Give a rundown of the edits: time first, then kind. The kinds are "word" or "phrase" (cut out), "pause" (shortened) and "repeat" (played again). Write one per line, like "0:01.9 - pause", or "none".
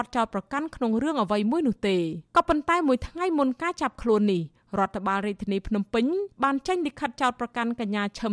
0:02.3 - pause
0:06.3 - pause

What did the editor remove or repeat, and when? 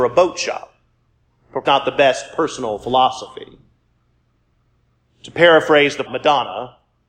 0:01.6 - word
0:06.1 - word

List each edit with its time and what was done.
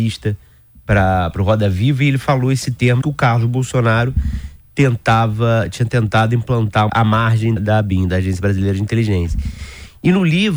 0:03.0 - word
0:06.9 - word
0:07.6 - word

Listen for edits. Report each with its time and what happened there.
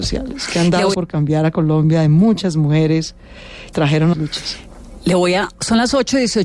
0:00.9 - word
0:03.7 - phrase
0:04.1 - phrase

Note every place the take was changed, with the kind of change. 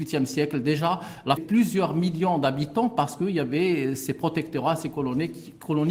0:01.4 - phrase

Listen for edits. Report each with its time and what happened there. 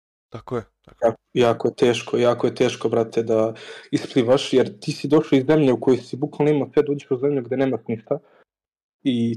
none

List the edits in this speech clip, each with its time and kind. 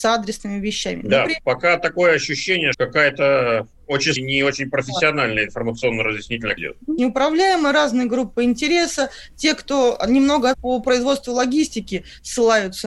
0:02.7 - word
0:04.2 - word
0:06.6 - word
0:07.0 - word
0:10.5 - word

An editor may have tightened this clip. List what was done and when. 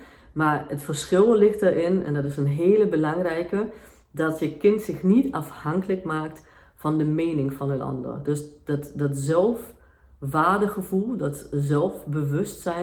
none

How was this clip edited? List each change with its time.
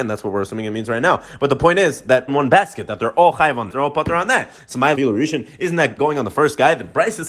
0:02.3 - phrase
0:03.7 - word
0:04.9 - phrase
0:06.0 - word

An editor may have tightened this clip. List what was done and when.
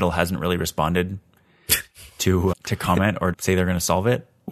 0:02.5 - word
0:03.3 - word

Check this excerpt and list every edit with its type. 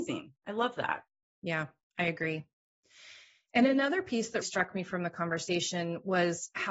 0:04.4 - word

